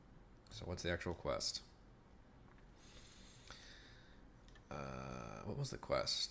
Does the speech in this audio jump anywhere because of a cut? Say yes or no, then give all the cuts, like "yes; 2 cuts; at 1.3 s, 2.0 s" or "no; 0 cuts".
no; 0 cuts